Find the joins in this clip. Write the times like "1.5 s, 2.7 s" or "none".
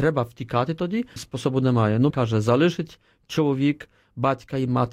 1.2 s, 2.1 s